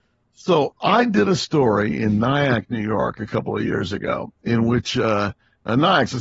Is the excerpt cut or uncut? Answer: uncut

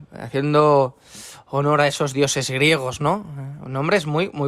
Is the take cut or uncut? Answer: uncut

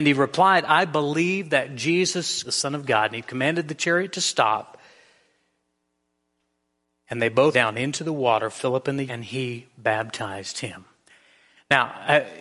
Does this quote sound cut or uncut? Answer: cut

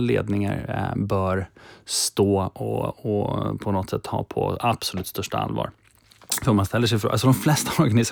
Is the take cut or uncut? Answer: uncut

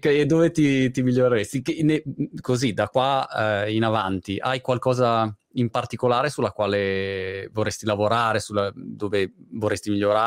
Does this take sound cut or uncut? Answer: uncut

